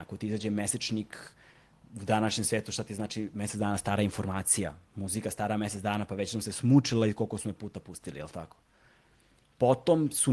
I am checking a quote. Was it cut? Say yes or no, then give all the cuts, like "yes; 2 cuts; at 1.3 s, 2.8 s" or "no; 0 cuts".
no; 0 cuts